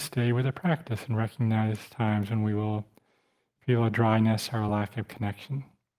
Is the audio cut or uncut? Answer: uncut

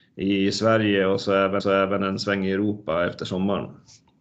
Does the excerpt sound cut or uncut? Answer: cut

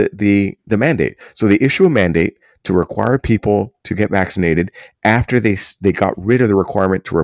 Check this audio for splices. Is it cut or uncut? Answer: uncut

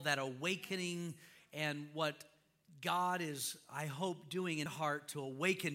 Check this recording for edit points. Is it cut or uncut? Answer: cut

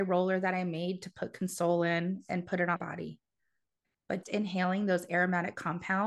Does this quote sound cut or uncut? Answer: cut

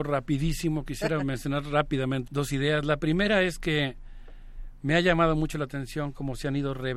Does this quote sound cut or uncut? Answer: cut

